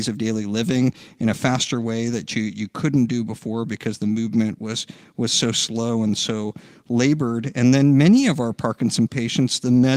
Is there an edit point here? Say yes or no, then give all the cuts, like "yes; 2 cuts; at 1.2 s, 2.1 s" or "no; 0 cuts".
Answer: no; 0 cuts